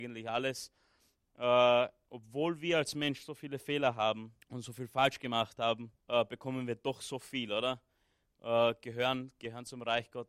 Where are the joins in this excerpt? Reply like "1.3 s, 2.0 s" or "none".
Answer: 4.4 s, 6.0 s